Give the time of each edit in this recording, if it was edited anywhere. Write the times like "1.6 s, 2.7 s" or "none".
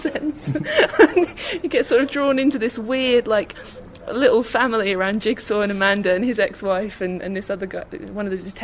none